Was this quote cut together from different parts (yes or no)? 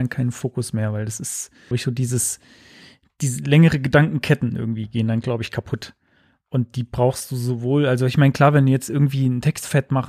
yes